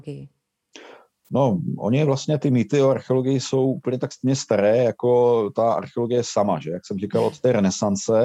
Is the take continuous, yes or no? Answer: yes